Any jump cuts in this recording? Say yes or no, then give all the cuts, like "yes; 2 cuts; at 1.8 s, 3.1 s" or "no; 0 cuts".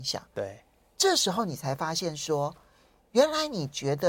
no; 0 cuts